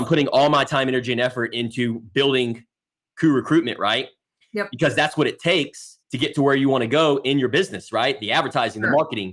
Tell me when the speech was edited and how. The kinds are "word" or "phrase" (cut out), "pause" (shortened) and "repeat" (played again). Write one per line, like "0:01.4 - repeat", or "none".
0:06.0 - pause